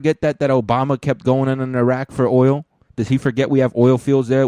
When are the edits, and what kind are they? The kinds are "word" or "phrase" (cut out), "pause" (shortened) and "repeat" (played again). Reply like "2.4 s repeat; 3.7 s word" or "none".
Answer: none